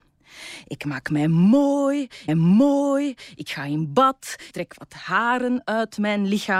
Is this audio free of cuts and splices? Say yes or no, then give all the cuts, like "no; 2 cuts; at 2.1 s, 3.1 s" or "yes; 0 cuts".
no; 2 cuts; at 2.3 s, 4.5 s